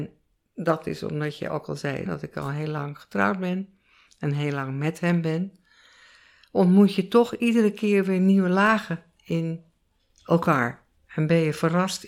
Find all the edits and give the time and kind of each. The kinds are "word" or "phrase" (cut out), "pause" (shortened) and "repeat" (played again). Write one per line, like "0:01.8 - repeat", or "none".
0:02.1 - word

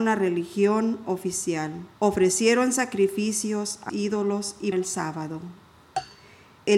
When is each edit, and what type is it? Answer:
0:01.9 - pause
0:03.9 - word
0:04.7 - word

